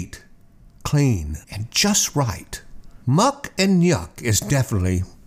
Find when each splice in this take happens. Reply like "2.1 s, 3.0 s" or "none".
1.4 s, 3.0 s